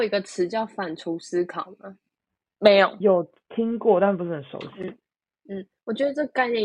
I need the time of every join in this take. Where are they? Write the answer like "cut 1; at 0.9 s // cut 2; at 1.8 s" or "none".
none